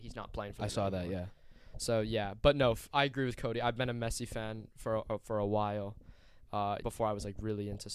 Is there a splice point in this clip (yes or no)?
yes